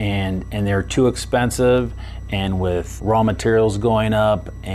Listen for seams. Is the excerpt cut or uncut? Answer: cut